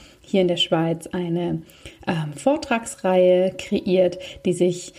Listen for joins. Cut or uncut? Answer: uncut